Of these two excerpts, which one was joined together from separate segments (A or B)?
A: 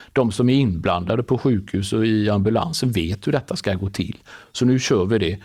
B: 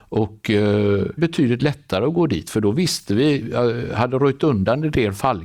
B